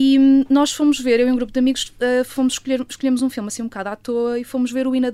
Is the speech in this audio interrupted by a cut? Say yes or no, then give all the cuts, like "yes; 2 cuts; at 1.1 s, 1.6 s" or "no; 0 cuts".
no; 0 cuts